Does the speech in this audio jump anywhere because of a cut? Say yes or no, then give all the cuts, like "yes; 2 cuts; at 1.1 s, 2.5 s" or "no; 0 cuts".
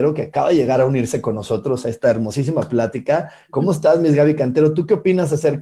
no; 0 cuts